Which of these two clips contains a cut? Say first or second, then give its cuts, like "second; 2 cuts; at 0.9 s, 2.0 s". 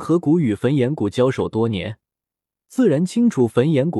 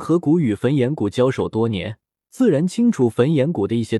second; 1 cut; at 2.1 s